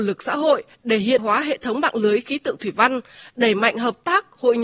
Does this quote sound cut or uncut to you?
cut